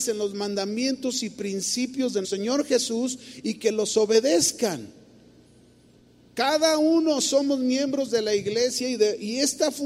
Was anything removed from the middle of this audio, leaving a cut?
yes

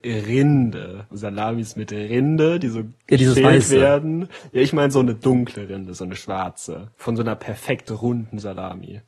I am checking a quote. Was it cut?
yes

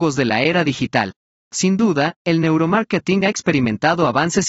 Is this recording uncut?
no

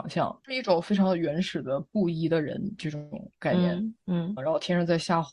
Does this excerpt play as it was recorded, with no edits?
no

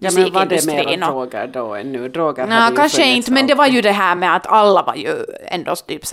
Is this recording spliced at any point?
no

